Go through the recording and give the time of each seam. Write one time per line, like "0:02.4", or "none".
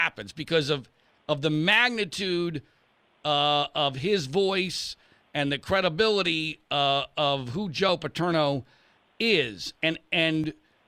none